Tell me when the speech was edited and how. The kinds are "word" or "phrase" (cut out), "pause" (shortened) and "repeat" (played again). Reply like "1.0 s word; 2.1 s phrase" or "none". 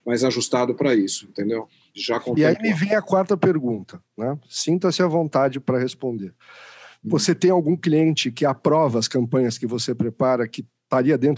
none